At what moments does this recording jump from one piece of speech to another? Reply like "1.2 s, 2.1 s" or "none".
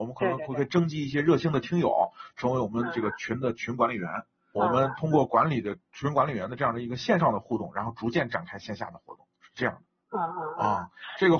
4.6 s, 9.9 s

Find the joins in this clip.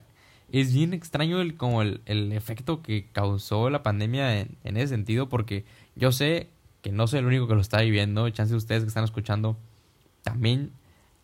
none

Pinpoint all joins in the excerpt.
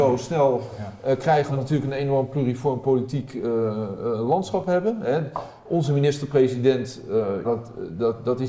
1.5 s, 7.4 s

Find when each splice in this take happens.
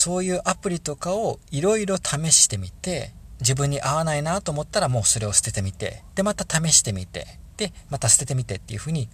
3.4 s

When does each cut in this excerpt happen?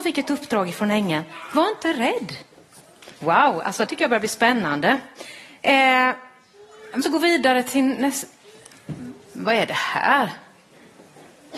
3.2 s, 3.9 s, 7.0 s

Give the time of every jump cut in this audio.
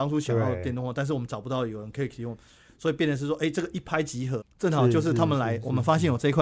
4.4 s

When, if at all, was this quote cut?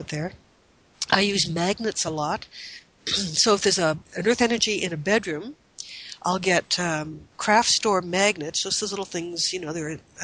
7.3 s

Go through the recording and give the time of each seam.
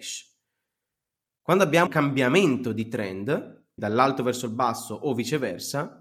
1.9 s, 3.8 s

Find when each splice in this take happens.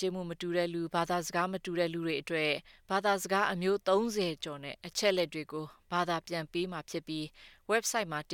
none

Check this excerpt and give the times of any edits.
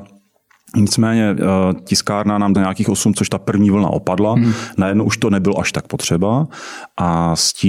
1.8 s, 2.5 s, 3.1 s

